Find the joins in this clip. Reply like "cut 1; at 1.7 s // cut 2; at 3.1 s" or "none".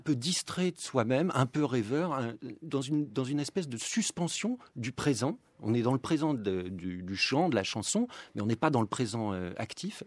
cut 1; at 4.7 s